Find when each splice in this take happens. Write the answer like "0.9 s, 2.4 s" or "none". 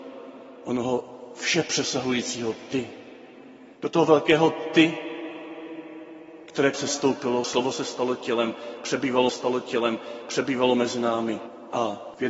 3.7 s, 6.7 s, 9.3 s

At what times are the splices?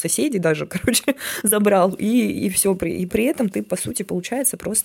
3.1 s

